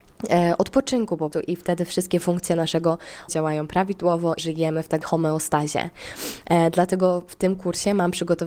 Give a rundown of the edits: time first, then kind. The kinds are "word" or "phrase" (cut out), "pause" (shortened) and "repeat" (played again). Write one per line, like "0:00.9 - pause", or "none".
0:01.3 - word
0:03.3 - word
0:04.4 - word
0:05.0 - word